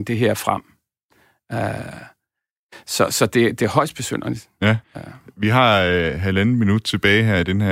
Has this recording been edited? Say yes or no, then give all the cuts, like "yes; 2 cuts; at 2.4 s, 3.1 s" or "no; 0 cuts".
yes; 1 cut; at 4.8 s